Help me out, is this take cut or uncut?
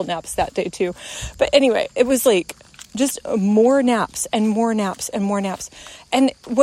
uncut